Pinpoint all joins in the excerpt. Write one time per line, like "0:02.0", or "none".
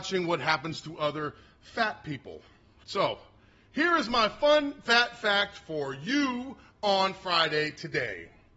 none